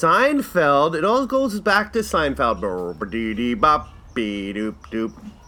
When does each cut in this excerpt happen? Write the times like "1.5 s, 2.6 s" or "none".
none